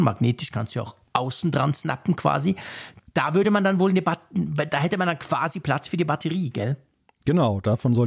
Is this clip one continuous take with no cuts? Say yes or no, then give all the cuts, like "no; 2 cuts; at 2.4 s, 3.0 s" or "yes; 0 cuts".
yes; 0 cuts